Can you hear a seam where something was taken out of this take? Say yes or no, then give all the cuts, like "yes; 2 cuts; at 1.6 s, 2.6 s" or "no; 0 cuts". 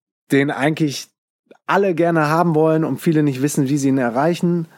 no; 0 cuts